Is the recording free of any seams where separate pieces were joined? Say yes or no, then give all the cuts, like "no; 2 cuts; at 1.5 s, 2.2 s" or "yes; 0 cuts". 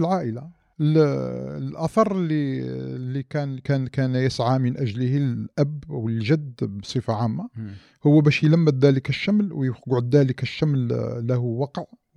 yes; 0 cuts